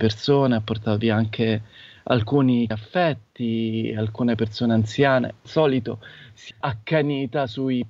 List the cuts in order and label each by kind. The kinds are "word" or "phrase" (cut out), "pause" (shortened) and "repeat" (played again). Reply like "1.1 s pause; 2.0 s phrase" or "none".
2.7 s word; 5.4 s word; 6.5 s word